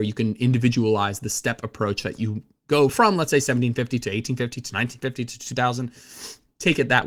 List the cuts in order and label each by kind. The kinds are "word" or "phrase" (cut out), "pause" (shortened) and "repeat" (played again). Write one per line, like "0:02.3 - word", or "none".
none